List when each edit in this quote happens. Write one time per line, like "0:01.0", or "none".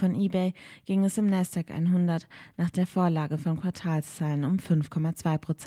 none